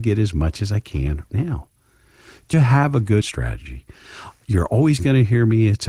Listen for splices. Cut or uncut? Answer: cut